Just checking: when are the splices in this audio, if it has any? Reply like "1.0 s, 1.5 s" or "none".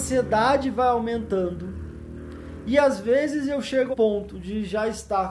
3.9 s